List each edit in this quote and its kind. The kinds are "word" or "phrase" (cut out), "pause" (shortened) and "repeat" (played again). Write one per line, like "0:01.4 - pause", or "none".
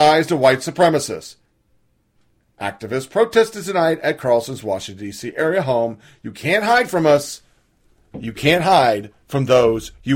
none